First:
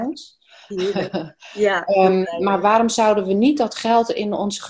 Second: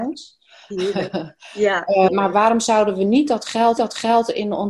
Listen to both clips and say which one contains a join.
second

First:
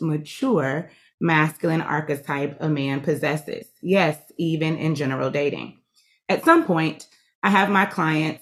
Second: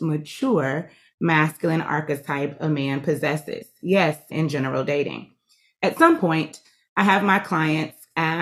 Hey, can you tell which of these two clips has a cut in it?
second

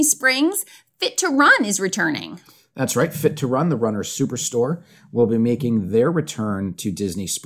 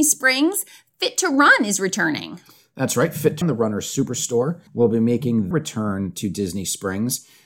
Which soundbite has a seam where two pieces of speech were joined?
second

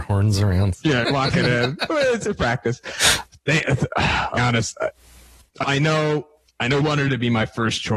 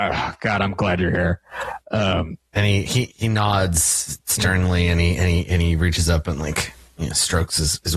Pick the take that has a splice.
first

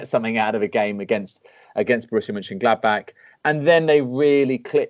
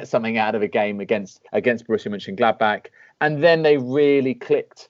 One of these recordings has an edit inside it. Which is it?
second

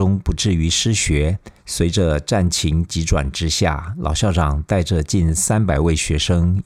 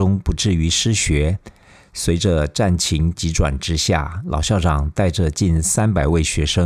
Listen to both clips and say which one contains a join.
first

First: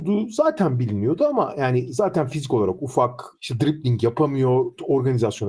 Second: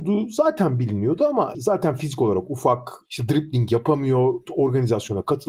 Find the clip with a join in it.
second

